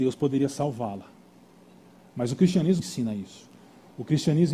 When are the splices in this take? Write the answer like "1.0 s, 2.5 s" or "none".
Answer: 2.8 s